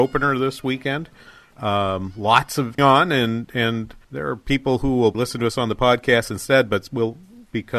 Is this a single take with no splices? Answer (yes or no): no